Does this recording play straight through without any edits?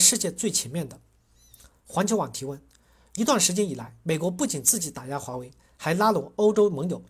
yes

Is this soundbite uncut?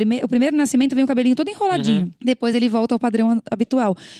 yes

